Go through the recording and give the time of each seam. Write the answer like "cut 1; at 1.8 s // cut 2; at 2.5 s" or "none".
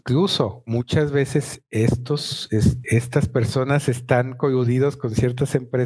cut 1; at 2.8 s